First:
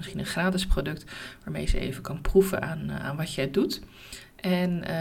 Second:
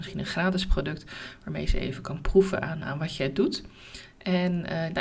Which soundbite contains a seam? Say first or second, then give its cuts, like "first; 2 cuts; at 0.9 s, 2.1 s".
second; 1 cut; at 2.8 s